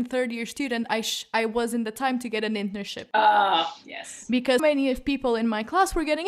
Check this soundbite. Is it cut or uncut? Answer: cut